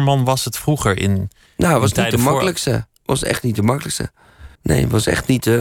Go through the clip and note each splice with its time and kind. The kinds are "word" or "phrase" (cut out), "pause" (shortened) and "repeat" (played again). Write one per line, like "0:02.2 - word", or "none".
0:01.5 - pause
0:04.5 - pause